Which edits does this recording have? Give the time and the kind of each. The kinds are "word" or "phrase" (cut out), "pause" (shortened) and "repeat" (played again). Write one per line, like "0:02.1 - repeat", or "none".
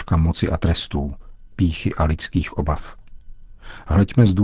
0:01.5 - word